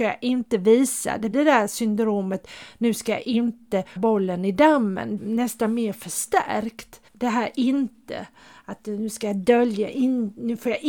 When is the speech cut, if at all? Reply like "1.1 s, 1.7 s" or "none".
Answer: 1.3 s, 4.0 s, 5.2 s, 7.1 s